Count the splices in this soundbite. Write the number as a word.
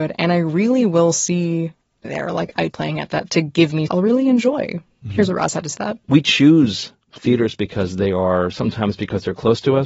five